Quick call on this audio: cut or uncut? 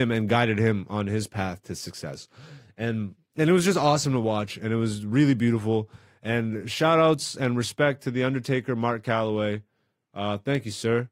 uncut